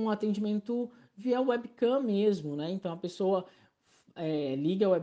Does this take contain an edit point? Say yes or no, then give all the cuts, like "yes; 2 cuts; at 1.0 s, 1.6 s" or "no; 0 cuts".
no; 0 cuts